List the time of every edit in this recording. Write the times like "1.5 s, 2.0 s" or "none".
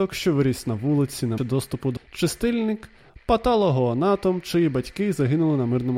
1.4 s, 2.0 s